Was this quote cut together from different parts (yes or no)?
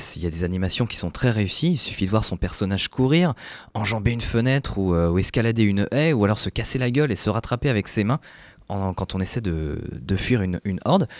no